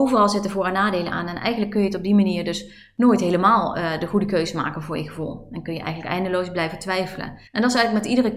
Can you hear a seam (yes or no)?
yes